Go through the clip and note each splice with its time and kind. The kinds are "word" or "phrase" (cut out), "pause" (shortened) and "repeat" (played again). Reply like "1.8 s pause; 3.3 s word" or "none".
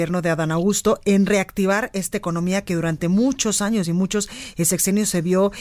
none